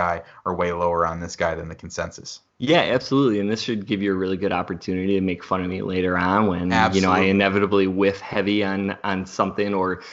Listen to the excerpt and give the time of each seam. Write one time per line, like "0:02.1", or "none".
0:02.5